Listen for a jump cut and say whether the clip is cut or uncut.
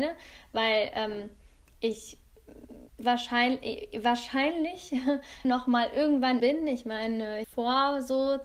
cut